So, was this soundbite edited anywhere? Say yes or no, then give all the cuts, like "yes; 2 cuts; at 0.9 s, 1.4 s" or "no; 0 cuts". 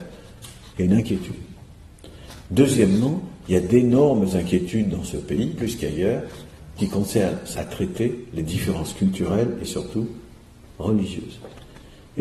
yes; 3 cuts; at 5.6 s, 6.8 s, 7.5 s